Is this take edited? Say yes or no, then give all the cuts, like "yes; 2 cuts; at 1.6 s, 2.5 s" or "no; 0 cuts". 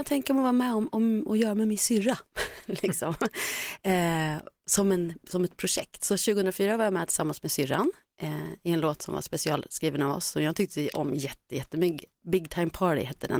no; 0 cuts